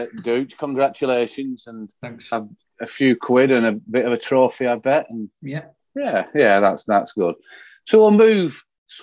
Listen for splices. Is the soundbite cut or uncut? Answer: uncut